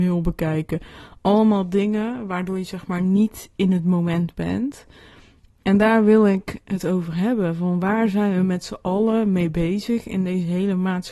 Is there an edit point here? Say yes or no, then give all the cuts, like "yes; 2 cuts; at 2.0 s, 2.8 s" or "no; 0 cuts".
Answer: no; 0 cuts